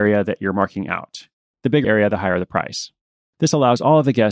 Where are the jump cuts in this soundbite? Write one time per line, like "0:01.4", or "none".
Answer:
0:01.8

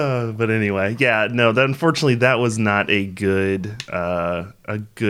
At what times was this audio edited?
none

